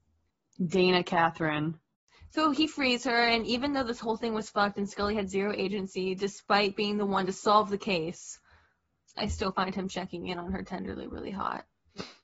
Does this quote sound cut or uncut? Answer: uncut